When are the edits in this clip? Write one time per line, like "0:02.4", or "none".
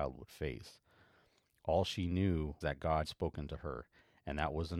0:02.6
0:03.0